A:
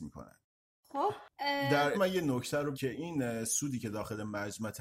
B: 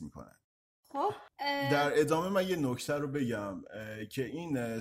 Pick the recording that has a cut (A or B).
A